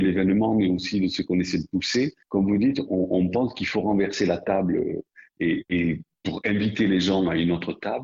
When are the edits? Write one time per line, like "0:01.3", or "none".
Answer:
0:02.2
0:02.9